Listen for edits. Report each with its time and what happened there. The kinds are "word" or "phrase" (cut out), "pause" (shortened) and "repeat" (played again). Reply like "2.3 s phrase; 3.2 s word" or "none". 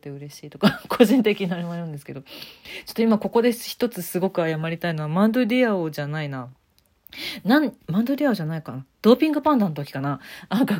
8.9 s pause